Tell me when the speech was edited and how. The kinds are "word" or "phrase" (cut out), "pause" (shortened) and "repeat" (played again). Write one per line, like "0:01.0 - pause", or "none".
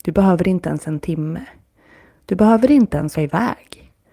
0:03.1 - word